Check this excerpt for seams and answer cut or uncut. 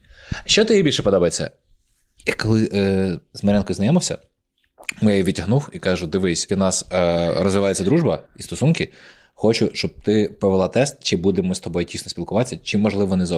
cut